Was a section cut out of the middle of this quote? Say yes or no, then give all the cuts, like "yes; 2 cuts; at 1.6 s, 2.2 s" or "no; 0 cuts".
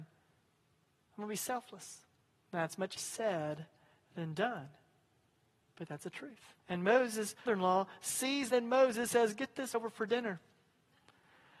yes; 7 cuts; at 2.2 s, 3.0 s, 6.6 s, 7.5 s, 8.5 s, 9.1 s, 9.7 s